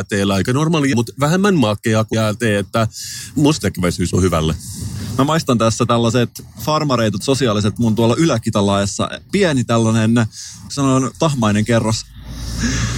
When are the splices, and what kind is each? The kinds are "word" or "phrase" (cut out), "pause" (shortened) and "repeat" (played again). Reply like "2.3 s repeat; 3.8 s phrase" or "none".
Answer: 0.9 s word; 2.1 s word; 3.6 s word; 4.1 s word; 7.2 s word; 7.8 s word; 9.3 s word; 10.7 s word; 11.1 s word